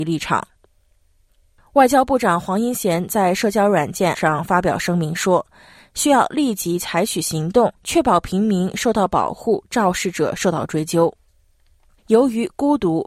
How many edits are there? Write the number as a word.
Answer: three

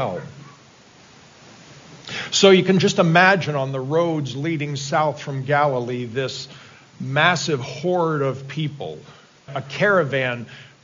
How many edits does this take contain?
one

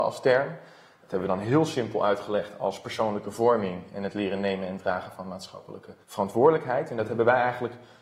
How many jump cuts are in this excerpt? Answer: one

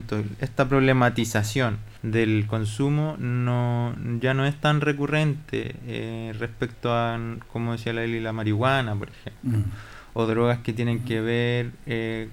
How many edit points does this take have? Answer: one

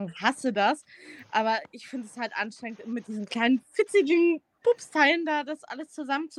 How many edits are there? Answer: zero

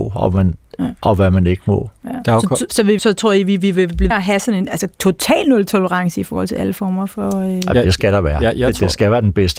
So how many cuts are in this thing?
three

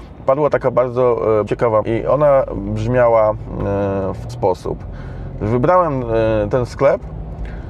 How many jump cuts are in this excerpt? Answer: four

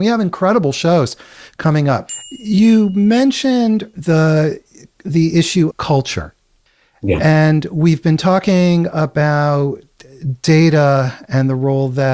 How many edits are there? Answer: three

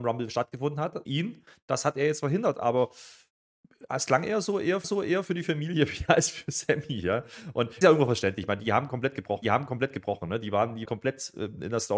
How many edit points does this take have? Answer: five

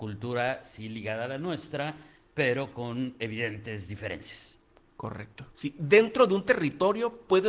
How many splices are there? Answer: one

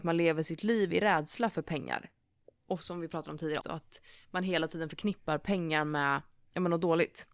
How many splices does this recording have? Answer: one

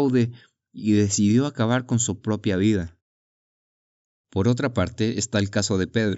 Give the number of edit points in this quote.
zero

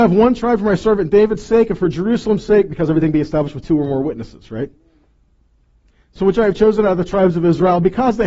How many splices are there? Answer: zero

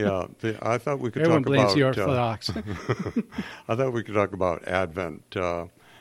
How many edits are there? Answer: zero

